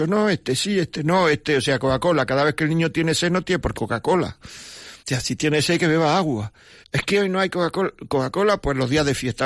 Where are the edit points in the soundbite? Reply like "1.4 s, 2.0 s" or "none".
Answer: 3.7 s, 5.0 s, 6.8 s

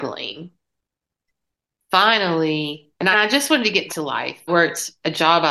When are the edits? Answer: 3.1 s, 3.9 s, 4.5 s

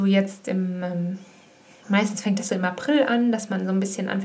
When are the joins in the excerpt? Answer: none

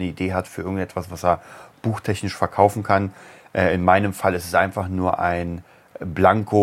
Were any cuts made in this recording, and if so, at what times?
none

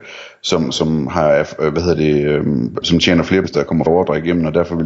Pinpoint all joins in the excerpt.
2.8 s, 3.4 s, 3.9 s

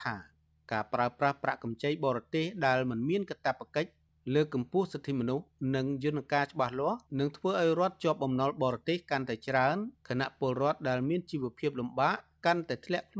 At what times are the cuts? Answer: 7.1 s, 10.0 s

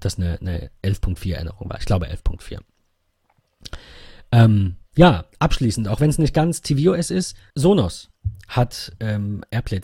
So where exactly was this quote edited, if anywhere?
4.9 s, 7.5 s

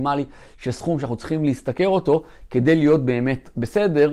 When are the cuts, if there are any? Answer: none

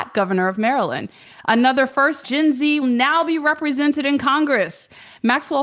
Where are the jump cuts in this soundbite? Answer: 2.2 s, 2.8 s

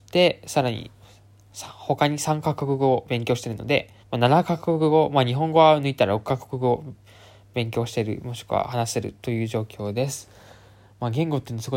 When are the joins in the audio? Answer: 4.0 s

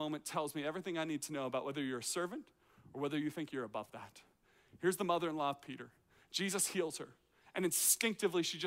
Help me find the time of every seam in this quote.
none

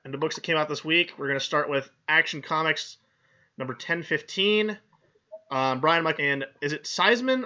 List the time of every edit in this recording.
6.2 s

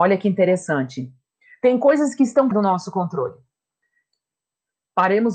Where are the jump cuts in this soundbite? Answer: 2.5 s

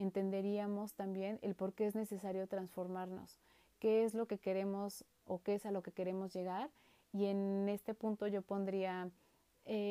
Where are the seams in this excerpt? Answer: none

